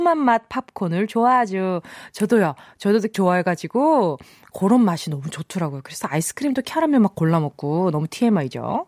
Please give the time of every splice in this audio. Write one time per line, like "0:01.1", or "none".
0:03.1